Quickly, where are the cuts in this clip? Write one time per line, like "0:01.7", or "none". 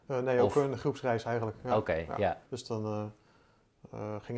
0:02.5